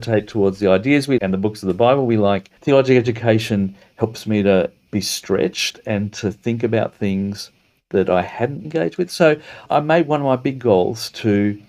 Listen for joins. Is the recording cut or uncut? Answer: cut